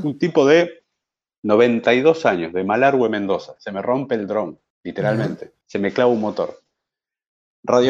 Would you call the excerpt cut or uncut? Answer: cut